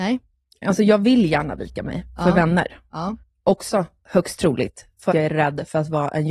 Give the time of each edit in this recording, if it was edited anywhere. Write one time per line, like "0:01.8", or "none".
0:03.2
0:05.1